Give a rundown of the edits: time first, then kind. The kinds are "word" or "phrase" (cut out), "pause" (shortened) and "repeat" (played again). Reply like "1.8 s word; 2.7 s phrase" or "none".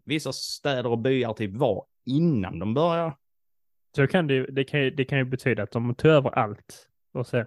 none